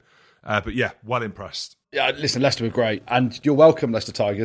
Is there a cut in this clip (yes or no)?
yes